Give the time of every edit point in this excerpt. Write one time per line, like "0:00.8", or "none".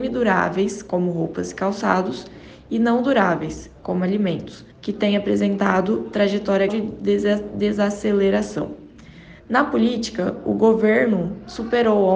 0:04.7
0:06.7
0:09.4